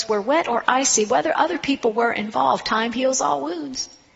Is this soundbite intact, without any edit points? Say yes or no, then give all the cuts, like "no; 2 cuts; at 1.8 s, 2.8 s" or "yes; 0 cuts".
yes; 0 cuts